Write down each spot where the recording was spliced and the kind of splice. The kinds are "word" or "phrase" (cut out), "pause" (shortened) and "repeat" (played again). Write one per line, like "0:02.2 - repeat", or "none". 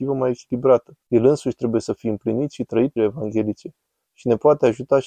0:01.0 - pause
0:03.0 - word